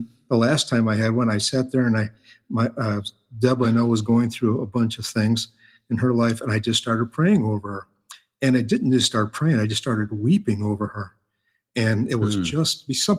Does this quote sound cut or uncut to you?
uncut